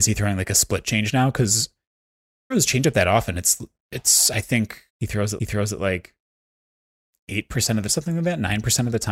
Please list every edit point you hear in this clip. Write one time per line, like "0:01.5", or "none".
0:02.5
0:04.9
0:05.4
0:07.9